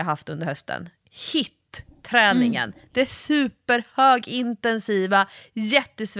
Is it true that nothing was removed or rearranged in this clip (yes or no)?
yes